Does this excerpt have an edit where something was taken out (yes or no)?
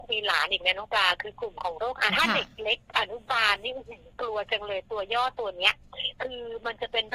yes